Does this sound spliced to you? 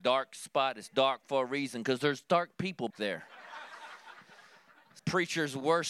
yes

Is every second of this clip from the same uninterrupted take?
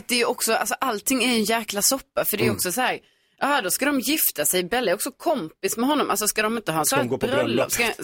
yes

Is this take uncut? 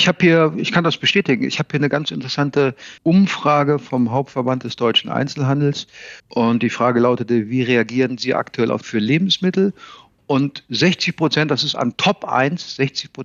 no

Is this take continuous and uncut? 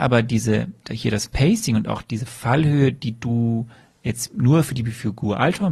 yes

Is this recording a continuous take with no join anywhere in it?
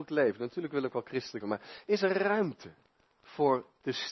no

